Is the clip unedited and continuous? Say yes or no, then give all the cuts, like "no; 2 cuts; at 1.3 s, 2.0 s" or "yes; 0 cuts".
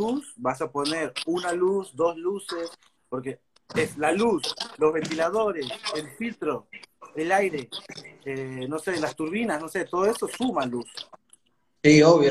yes; 0 cuts